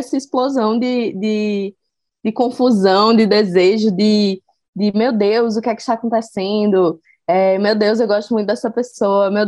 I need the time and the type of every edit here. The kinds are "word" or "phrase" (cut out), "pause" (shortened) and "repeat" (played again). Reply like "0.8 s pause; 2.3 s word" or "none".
none